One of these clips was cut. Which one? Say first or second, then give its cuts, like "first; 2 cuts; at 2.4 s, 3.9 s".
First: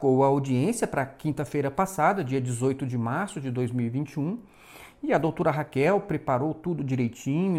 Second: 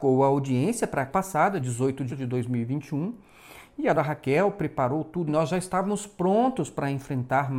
second; 5 cuts; at 1.1 s, 1.6 s, 2.1 s, 3.9 s, 5.3 s